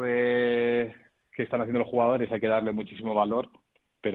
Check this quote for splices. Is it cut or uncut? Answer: uncut